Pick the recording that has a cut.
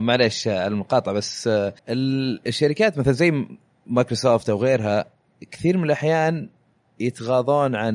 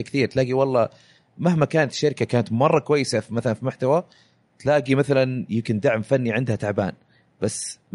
first; 1 cut; at 1.8 s

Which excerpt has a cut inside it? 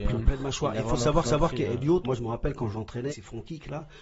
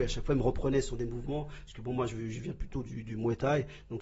first; 3 cuts; at 1.2 s, 2.0 s, 3.1 s

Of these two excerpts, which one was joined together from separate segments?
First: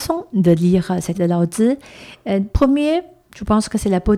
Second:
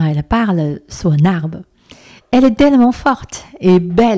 first; 2 cuts; at 1.1 s, 2.5 s

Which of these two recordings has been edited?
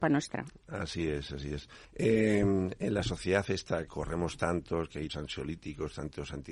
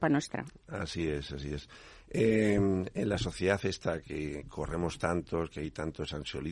first; 3 cuts; at 1.8 s, 3.9 s, 5.1 s

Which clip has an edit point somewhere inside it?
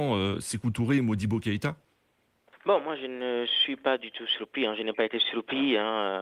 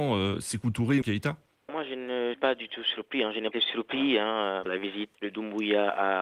second; 6 cuts; at 1.0 s, 1.7 s, 2.3 s, 3.5 s, 4.7 s, 5.1 s

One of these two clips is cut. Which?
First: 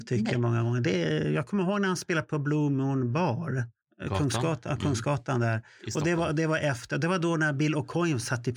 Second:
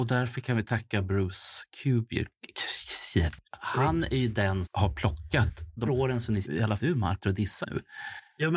second; 6 cuts; at 4.6 s, 5.9 s, 6.4 s, 6.8 s, 7.2 s, 7.6 s

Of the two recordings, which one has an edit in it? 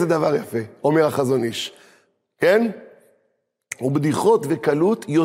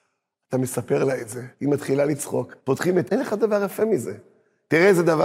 second; 3 cuts; at 1.5 s, 2.6 s, 3.1 s

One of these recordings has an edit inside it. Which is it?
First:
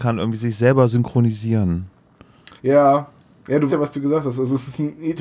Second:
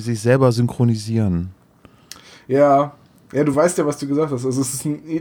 first; 2 cuts; at 2.6 s, 3.7 s

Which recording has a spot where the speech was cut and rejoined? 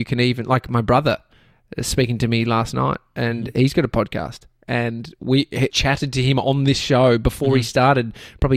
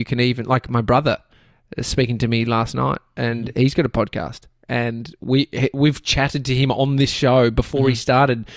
first; 1 cut; at 5.7 s

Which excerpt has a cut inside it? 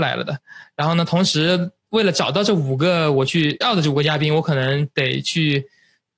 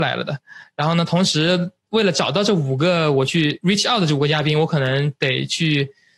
first; 1 cut; at 3.6 s

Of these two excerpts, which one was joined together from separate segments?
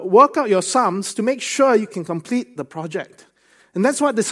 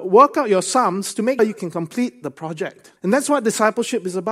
second; 2 cuts; at 1.4 s, 3.0 s

